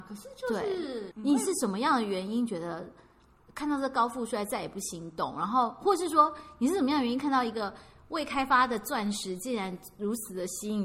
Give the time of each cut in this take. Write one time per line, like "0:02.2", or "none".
none